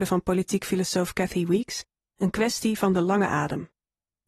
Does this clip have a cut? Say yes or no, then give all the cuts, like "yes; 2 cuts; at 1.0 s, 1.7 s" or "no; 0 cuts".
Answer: no; 0 cuts